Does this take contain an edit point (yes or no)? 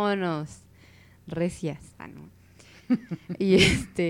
no